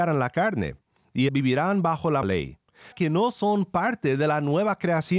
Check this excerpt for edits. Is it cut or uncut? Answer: cut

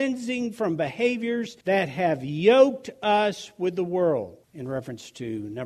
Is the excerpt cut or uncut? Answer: cut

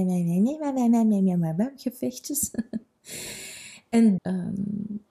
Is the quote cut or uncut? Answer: cut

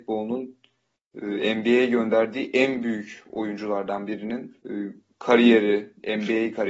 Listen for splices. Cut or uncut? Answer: cut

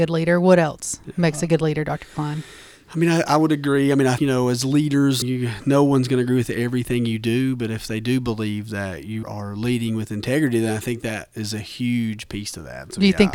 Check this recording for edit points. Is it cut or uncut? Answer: cut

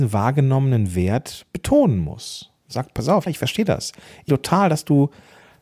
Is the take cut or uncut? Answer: cut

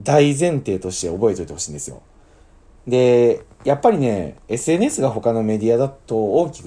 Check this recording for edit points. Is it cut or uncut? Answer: uncut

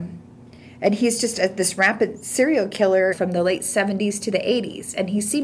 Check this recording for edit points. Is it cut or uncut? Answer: cut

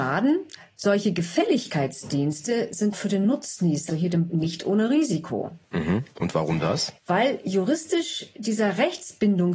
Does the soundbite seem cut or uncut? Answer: cut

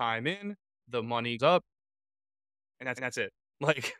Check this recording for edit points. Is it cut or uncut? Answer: cut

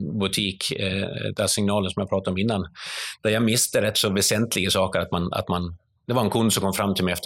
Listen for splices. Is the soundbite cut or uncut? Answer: uncut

